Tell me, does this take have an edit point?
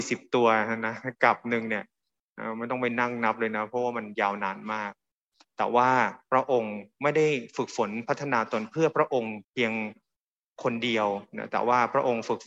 yes; 1 cut; at 9.4 s

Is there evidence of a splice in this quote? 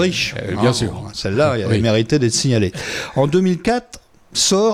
no; 0 cuts

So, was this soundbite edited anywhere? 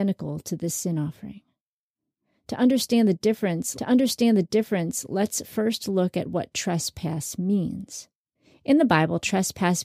yes; 2 cuts; at 3.8 s, 8.4 s

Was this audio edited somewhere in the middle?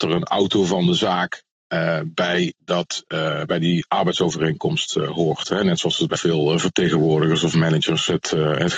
yes; 1 cut; at 6.2 s

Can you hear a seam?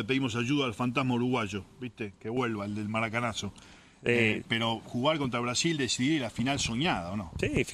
no; 0 cuts

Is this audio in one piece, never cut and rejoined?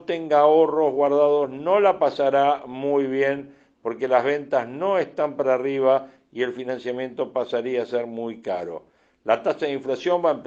yes; 0 cuts

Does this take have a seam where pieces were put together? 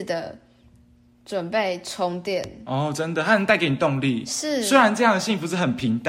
no; 0 cuts

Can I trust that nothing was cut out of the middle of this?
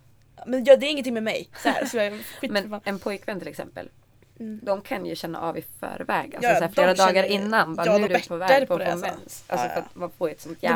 no; 1 cut; at 8.1 s

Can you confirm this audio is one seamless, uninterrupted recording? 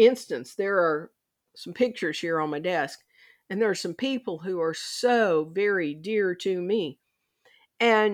yes; 0 cuts

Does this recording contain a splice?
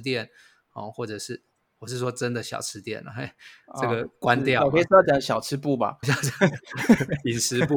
yes; 1 cut; at 6.0 s

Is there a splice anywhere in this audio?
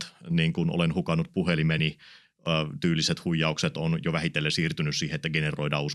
no; 0 cuts

